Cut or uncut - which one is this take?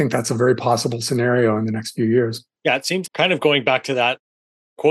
cut